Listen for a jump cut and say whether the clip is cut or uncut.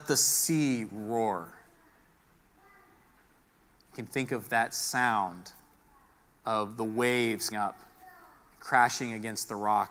cut